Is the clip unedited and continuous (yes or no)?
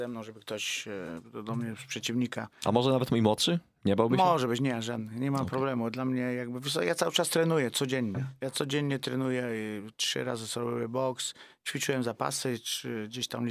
yes